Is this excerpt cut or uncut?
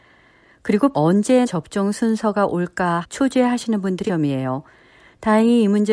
cut